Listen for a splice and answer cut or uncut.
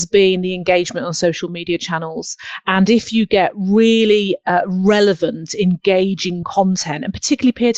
uncut